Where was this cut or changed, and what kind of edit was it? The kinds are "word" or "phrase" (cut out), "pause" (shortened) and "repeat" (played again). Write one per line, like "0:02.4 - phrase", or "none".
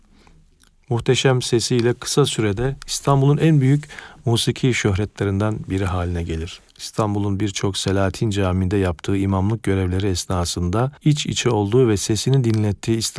0:06.7 - pause
0:11.0 - pause